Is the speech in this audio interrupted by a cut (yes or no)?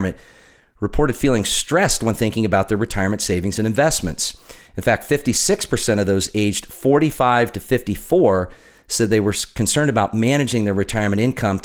no